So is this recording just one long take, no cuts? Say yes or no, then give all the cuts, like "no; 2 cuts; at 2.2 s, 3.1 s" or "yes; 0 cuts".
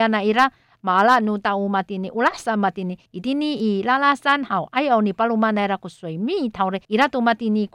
no; 2 cuts; at 3.1 s, 6.8 s